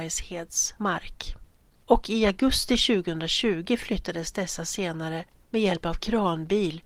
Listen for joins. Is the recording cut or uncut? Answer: uncut